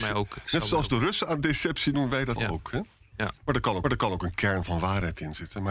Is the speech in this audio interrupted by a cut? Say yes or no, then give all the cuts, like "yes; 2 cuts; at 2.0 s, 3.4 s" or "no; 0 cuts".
yes; 4 cuts; at 1.9 s, 2.4 s, 3.4 s, 3.8 s